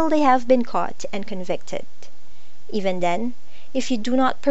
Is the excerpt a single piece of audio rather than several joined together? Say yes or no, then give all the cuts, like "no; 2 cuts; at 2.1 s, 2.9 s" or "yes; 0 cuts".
yes; 0 cuts